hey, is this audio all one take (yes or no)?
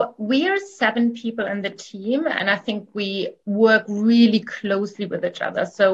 yes